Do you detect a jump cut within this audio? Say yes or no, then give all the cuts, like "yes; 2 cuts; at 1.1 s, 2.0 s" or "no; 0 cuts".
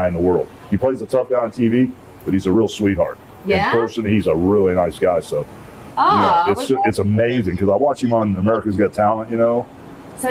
no; 0 cuts